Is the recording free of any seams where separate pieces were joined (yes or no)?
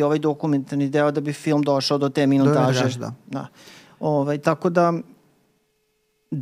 yes